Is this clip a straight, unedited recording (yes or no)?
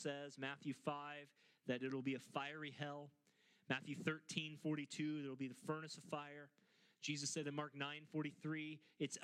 yes